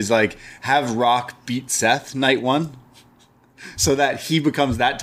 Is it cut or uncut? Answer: uncut